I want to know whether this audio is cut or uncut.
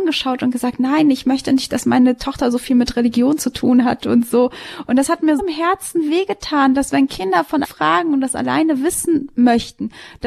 cut